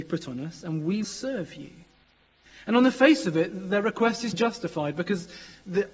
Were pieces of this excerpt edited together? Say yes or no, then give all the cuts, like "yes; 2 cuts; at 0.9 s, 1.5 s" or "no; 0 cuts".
yes; 2 cuts; at 1.0 s, 4.3 s